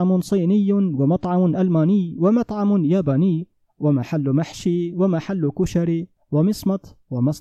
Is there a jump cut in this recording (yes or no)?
no